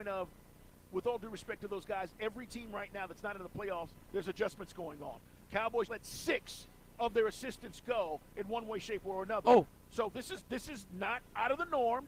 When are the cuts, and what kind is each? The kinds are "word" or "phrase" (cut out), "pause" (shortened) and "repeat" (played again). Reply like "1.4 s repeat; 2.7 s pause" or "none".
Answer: 5.9 s word